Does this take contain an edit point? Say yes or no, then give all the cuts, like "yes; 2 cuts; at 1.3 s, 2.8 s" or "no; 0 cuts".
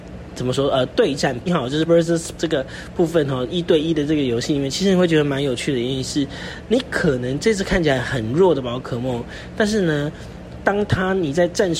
yes; 3 cuts; at 1.5 s, 1.9 s, 2.4 s